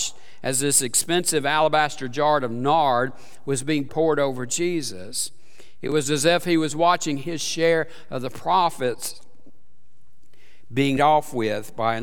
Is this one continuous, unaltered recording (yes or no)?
no